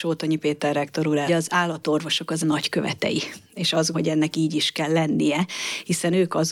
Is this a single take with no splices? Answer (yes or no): no